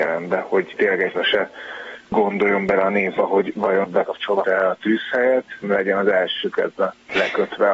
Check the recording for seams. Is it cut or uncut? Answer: cut